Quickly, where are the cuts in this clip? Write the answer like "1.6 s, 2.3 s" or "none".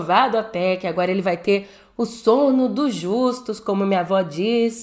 none